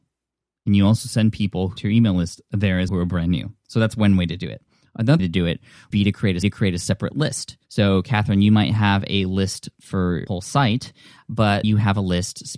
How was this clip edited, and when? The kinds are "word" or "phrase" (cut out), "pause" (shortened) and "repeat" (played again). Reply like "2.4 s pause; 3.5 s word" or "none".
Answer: 1.8 s word; 2.9 s word; 5.2 s word; 5.9 s word; 6.4 s repeat; 7.6 s pause; 10.3 s word; 11.6 s word